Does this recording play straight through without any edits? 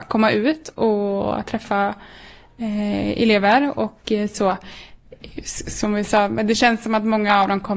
yes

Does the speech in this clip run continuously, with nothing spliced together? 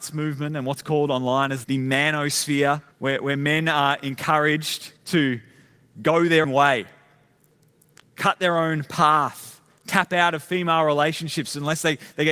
no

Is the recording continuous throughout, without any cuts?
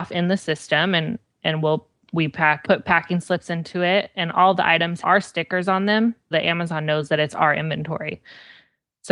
no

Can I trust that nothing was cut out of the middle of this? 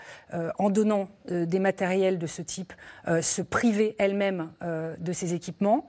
yes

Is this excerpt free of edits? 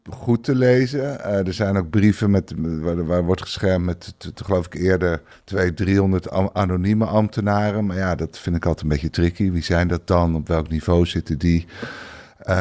no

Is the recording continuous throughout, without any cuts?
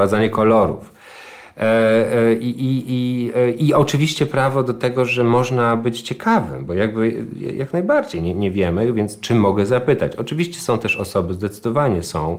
yes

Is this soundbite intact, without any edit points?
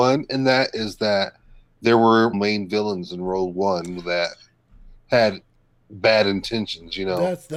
no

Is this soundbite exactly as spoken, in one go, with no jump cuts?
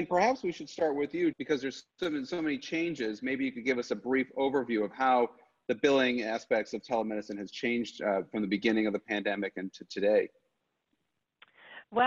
no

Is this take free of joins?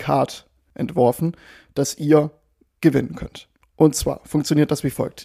yes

